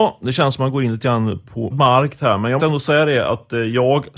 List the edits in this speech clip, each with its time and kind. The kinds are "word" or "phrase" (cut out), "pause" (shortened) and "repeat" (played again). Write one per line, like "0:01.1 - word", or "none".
0:01.7 - word
0:02.6 - word